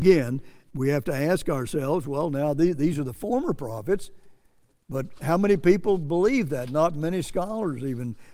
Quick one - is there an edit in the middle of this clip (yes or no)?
no